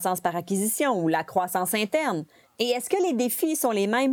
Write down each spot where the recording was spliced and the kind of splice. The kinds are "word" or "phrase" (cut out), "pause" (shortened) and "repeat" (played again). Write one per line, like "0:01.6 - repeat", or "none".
none